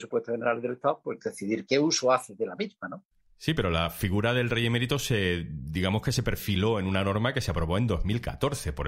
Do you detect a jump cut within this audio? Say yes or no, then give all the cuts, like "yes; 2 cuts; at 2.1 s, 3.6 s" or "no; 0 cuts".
no; 0 cuts